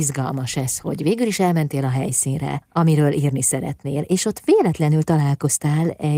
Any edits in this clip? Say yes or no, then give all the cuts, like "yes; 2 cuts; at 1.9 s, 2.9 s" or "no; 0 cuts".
no; 0 cuts